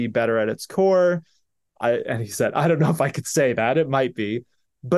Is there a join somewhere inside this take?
no; 0 cuts

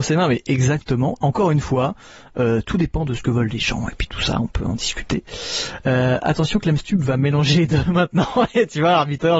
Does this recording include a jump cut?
no; 0 cuts

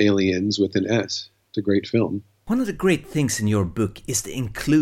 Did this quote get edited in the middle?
no; 0 cuts

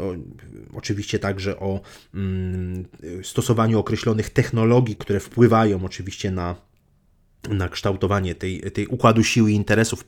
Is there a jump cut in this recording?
yes; 1 cut; at 5.0 s

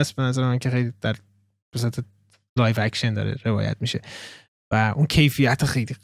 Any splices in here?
no; 0 cuts

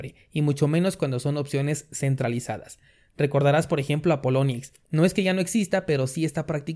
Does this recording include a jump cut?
no; 0 cuts

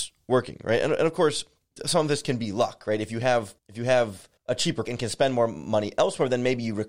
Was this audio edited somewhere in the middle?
yes; 4 cuts; at 1.8 s, 3.6 s, 4.4 s, 4.8 s

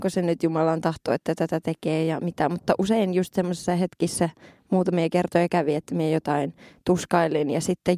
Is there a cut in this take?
no; 0 cuts

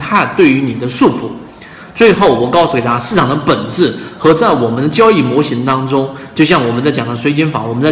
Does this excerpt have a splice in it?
no; 0 cuts

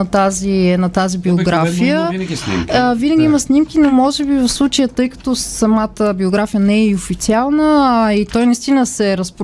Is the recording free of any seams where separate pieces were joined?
yes; 0 cuts

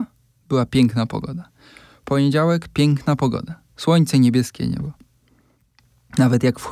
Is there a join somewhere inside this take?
no; 0 cuts

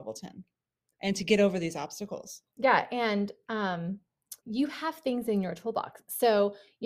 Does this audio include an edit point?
yes; 2 cuts; at 2.5 s, 4.4 s

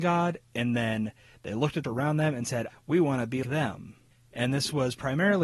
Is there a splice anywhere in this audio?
yes; 3 cuts; at 1.8 s, 2.7 s, 3.4 s

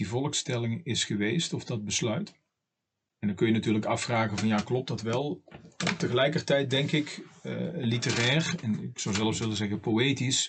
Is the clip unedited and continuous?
yes; 0 cuts

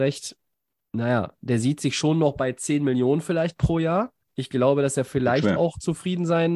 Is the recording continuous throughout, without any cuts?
no; 1 cut; at 4.2 s

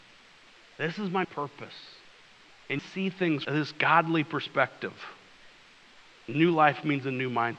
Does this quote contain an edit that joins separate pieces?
yes; 3 cuts; at 1.2 s, 2.8 s, 3.4 s

